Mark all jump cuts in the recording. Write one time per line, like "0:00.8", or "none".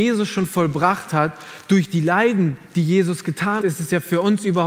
0:03.6

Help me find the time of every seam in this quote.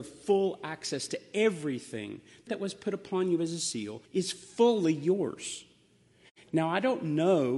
0:02.5
0:04.0

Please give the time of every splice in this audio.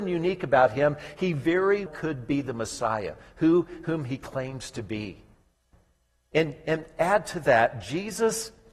0:01.9

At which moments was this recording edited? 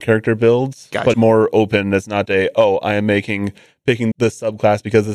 0:01.1
0:02.3
0:04.1

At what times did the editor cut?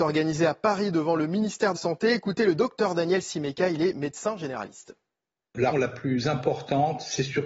0:01.8
0:05.7

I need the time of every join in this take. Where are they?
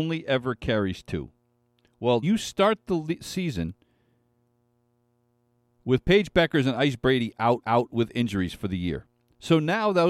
0:02.2
0:07.6

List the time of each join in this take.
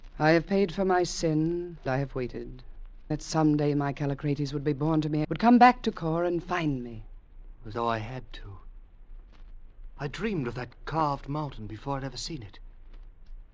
0:01.9
0:03.1
0:05.2
0:07.7

